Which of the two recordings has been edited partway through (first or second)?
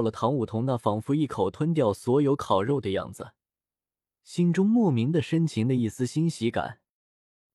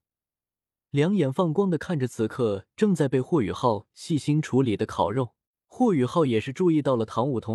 second